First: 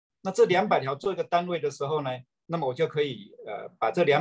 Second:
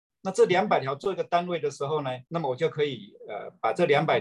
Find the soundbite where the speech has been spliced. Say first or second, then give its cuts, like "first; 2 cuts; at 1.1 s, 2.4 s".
second; 1 cut; at 2.3 s